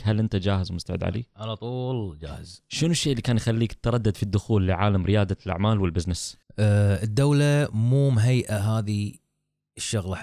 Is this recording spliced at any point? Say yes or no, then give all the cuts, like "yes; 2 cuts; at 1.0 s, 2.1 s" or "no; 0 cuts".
yes; 1 cut; at 6.4 s